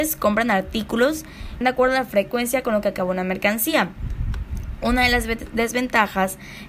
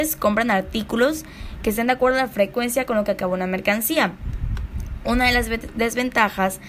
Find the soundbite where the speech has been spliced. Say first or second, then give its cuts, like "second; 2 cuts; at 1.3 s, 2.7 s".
first; 1 cut; at 1.6 s